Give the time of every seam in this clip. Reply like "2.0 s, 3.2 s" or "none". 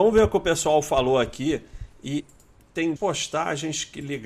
2.2 s, 3.0 s